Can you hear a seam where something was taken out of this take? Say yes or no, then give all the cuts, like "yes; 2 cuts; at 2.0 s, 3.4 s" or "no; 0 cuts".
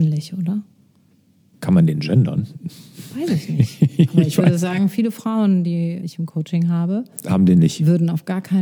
yes; 1 cut; at 6.0 s